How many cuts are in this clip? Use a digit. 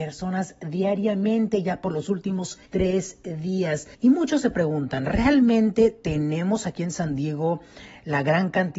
2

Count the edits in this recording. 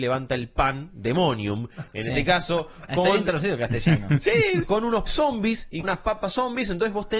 3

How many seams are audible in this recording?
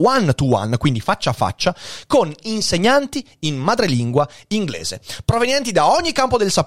0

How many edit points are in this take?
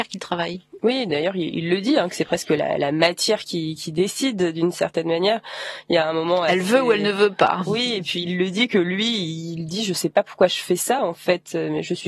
0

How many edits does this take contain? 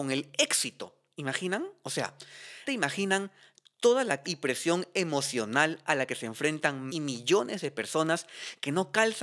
3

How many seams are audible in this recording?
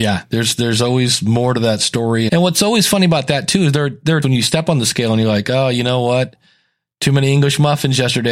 2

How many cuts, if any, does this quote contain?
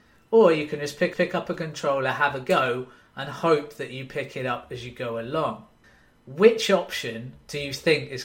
2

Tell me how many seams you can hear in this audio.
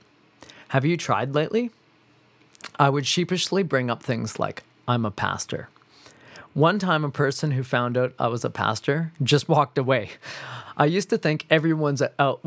0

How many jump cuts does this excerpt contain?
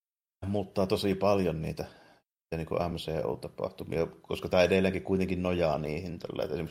0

